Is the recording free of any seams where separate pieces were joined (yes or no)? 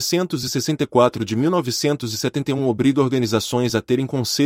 yes